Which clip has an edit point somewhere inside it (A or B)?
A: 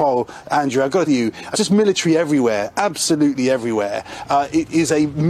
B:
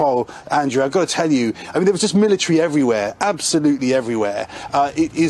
A